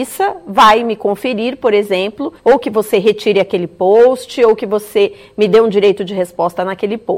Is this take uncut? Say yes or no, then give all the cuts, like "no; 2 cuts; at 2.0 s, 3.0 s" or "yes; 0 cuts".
no; 1 cut; at 2.4 s